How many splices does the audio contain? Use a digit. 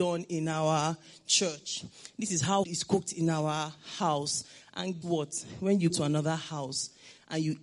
3